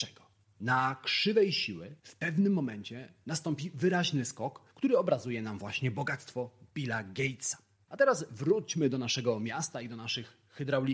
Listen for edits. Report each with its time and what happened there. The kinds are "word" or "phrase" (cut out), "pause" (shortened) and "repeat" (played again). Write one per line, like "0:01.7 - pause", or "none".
0:02.0 - pause